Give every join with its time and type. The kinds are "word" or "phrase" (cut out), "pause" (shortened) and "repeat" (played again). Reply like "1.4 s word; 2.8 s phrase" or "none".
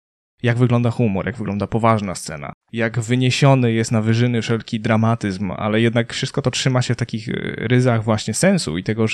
2.6 s pause